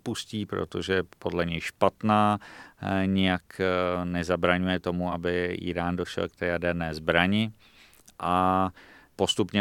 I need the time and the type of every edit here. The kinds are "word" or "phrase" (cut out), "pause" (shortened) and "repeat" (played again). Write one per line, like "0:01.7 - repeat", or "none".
none